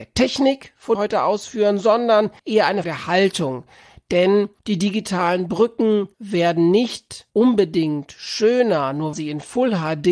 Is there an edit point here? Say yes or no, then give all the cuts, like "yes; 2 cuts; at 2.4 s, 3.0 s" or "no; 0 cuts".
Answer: yes; 7 cuts; at 0.9 s, 2.4 s, 2.8 s, 4.6 s, 6.1 s, 7.3 s, 9.1 s